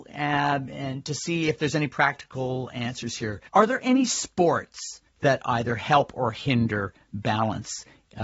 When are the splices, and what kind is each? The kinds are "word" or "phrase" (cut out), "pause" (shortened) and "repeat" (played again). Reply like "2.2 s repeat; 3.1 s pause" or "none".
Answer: 3.5 s pause; 5.1 s pause